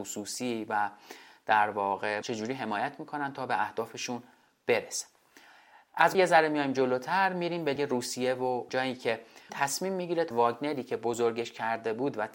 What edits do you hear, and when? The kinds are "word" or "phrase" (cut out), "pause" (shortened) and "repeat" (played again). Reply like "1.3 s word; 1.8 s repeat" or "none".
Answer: 2.2 s word; 6.1 s word; 7.8 s word; 8.7 s word; 9.5 s word; 10.3 s word